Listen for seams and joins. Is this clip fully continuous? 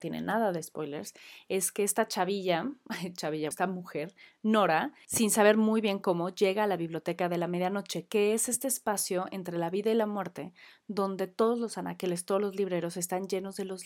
no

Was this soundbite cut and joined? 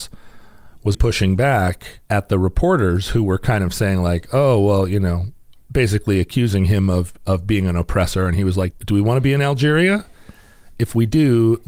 yes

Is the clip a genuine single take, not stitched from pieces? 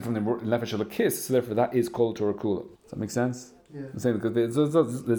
no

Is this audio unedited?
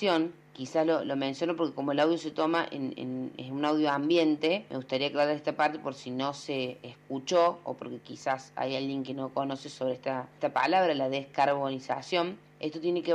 yes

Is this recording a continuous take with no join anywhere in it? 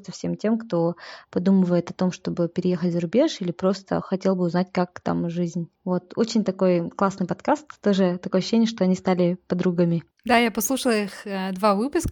no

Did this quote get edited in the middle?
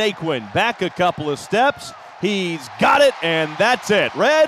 no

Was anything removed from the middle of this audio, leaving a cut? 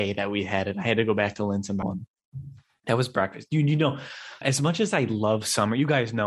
yes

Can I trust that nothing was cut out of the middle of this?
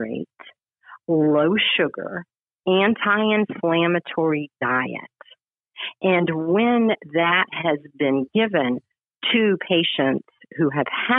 yes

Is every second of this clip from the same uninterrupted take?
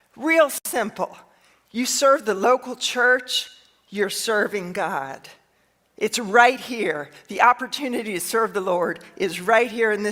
yes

